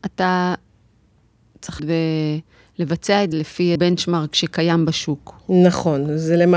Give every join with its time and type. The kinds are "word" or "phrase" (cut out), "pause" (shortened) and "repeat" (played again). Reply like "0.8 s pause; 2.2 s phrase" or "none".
1.8 s word; 3.3 s word; 3.8 s word